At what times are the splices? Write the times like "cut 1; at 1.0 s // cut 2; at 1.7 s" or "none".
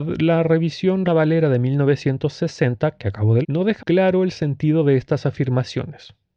cut 1; at 1.1 s // cut 2; at 3.4 s // cut 3; at 3.8 s

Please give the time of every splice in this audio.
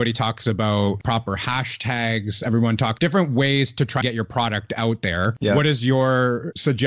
cut 1; at 3.0 s // cut 2; at 4.0 s

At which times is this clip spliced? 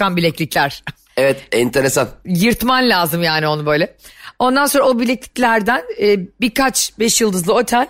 none

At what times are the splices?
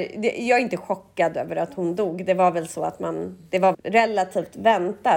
cut 1; at 3.7 s

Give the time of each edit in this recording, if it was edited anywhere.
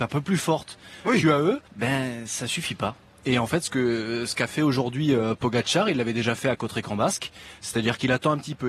cut 1; at 1.7 s

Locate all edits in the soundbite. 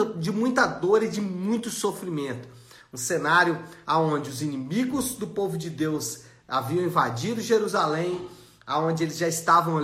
none

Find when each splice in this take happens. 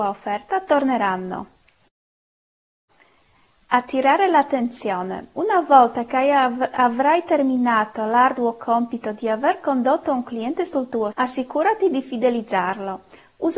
cut 1; at 11.1 s

